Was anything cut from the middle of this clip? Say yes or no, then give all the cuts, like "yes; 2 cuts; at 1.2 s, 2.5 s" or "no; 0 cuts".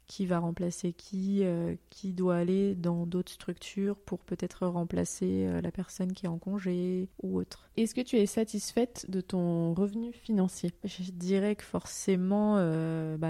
no; 0 cuts